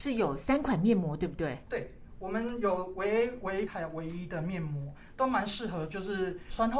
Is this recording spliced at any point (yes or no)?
yes